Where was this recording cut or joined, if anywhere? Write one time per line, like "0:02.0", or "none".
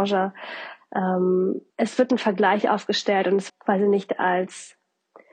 0:01.7
0:03.5